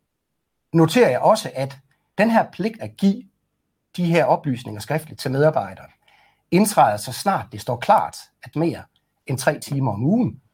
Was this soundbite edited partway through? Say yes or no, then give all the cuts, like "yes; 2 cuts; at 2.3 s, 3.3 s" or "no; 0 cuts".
yes; 2 cuts; at 2.8 s, 8.5 s